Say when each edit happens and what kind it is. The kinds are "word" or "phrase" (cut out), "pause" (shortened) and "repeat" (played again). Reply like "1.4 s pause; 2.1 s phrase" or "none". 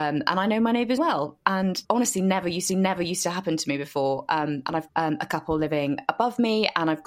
1.0 s word; 1.8 s word; 2.7 s repeat; 4.9 s word